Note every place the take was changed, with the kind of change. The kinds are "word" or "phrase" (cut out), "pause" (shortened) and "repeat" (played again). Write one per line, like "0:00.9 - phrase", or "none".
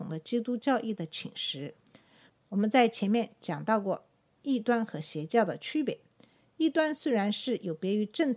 none